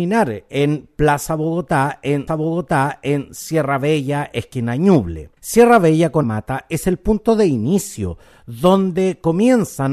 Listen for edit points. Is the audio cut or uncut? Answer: cut